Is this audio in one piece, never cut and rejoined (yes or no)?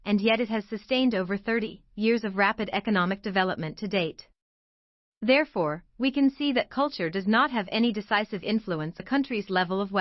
no